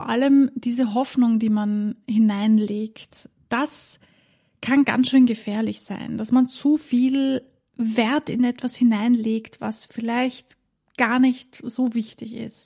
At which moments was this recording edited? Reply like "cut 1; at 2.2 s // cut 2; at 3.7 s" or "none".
none